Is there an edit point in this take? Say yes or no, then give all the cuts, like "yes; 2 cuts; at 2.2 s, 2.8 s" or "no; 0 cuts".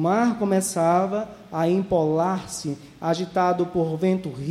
no; 0 cuts